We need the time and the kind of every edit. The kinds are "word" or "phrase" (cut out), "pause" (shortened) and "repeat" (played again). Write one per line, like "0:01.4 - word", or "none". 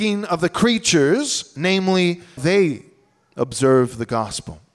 0:02.4 - phrase